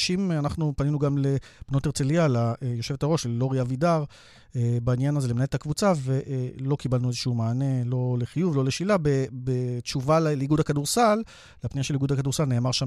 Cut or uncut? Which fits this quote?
uncut